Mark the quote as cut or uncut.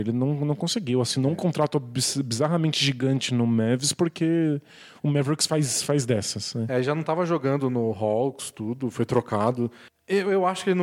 uncut